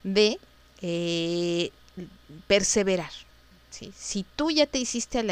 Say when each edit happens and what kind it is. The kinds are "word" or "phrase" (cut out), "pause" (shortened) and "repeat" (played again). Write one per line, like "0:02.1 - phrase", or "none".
none